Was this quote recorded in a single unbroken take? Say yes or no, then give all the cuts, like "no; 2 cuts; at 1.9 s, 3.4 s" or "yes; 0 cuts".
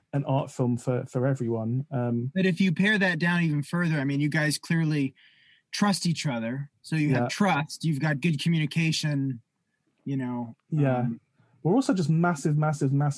yes; 0 cuts